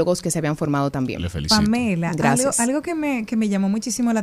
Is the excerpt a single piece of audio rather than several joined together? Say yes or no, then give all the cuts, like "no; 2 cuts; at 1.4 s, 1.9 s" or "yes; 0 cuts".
yes; 0 cuts